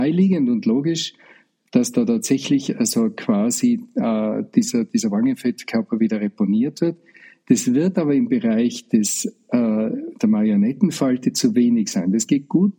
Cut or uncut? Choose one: uncut